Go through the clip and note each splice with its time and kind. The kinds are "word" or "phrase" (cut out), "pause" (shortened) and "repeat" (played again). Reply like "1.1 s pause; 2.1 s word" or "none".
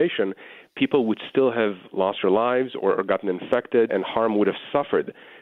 3.9 s word

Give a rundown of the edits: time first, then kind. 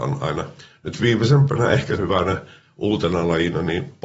2.0 s word

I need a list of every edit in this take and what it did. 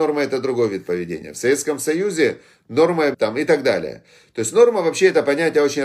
3.1 s phrase

